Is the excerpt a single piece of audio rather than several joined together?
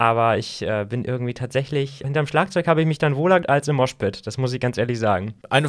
no; 2 cuts; at 2.0 s, 3.4 s

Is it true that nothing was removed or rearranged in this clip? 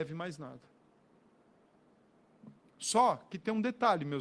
no; 1 cut; at 2.6 s

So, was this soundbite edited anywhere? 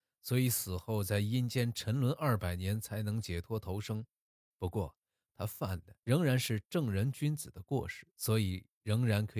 yes; 2 cuts; at 6.0 s, 8.1 s

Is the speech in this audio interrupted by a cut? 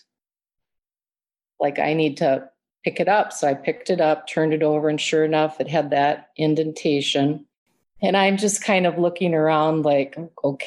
no; 0 cuts

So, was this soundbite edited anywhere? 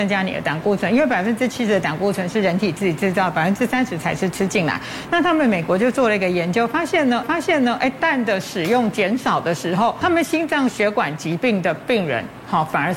yes; 2 cuts; at 7.2 s, 10.0 s

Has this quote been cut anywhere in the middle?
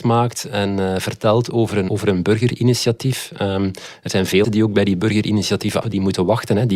yes; 3 cuts; at 1.9 s, 4.4 s, 5.8 s

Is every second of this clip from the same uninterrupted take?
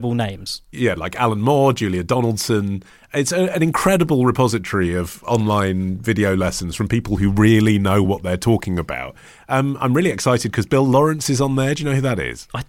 yes; 0 cuts

